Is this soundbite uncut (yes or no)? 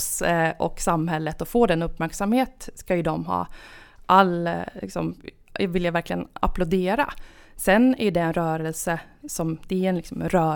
yes